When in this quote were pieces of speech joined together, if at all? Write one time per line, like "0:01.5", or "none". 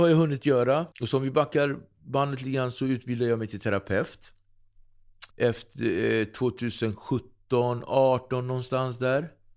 0:00.9
0:05.3